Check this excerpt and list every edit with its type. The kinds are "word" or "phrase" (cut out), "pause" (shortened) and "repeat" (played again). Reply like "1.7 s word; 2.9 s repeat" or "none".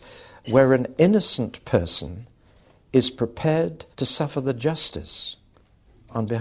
3.9 s pause